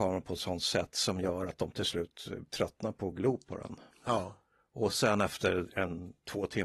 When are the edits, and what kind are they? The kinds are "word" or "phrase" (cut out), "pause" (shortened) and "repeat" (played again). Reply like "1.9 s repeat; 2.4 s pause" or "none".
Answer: none